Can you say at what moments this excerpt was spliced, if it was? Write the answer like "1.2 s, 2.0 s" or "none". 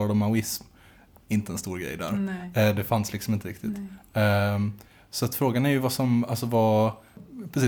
none